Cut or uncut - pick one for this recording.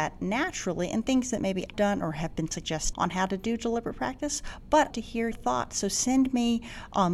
cut